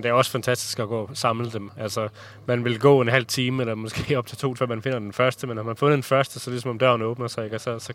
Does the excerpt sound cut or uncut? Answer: cut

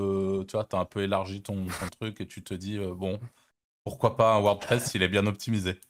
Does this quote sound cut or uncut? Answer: uncut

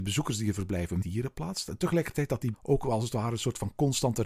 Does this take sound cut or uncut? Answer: cut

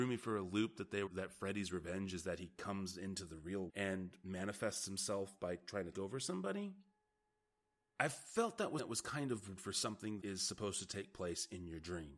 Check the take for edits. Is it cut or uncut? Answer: cut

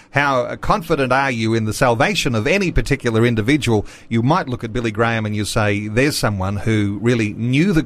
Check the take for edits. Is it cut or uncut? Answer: uncut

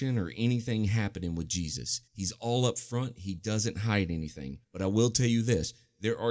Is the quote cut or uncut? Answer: cut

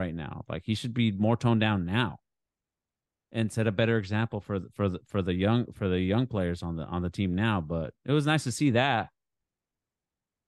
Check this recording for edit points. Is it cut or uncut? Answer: uncut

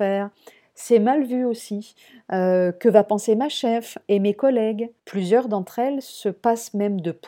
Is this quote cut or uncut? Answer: cut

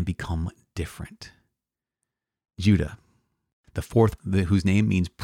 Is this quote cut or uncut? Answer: cut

